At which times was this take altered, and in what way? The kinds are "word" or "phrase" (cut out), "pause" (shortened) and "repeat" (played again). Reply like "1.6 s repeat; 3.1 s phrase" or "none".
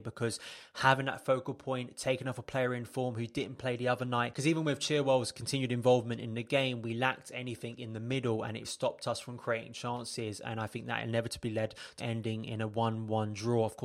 8.6 s word; 12.0 s phrase